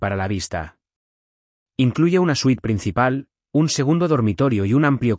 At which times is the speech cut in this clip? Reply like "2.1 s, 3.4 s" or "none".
none